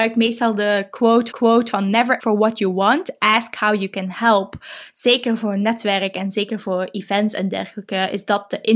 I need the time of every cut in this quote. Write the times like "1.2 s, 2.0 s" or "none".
1.3 s, 2.2 s